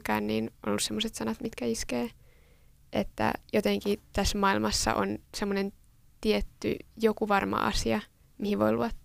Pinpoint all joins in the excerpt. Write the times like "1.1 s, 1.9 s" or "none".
none